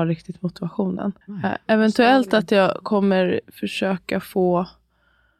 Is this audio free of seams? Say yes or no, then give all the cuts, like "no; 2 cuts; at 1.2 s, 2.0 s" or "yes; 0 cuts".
no; 1 cut; at 1.2 s